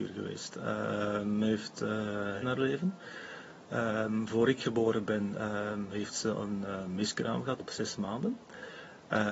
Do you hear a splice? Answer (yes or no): yes